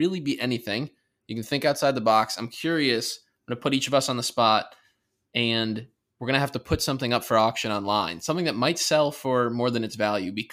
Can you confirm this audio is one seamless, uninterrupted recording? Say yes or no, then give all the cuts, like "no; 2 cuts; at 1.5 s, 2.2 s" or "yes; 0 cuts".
yes; 0 cuts